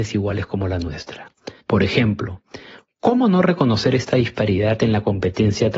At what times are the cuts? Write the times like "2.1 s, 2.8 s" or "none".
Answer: 1.6 s